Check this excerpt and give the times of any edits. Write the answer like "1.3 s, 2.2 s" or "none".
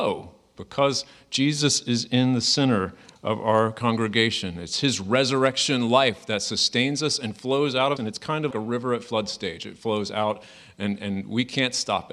8.0 s, 8.5 s

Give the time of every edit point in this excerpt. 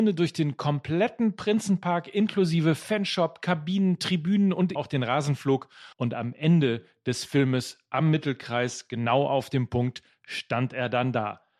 4.8 s, 5.9 s

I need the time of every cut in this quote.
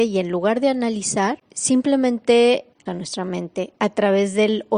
2.9 s, 3.8 s

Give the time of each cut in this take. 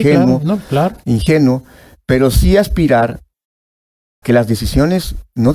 4.2 s

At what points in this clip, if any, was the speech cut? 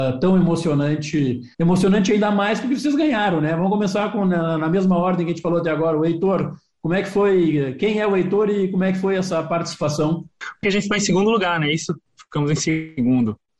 1.5 s, 10.6 s

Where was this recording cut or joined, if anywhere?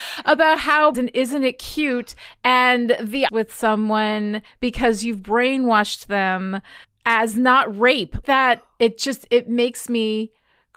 0.9 s, 3.3 s, 6.8 s, 8.2 s

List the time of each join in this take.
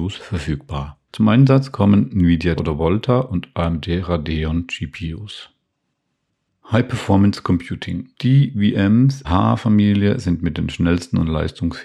1.1 s, 2.6 s, 8.1 s, 9.2 s

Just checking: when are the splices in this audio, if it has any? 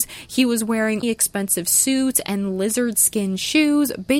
1.0 s

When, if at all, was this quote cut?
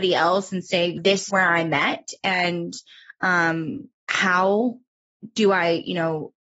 1.0 s, 1.3 s, 4.0 s

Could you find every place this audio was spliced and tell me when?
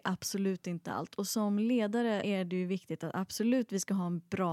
2.2 s

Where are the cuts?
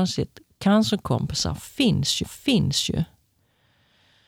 2.2 s

